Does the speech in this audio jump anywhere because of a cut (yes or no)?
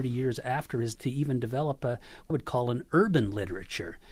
yes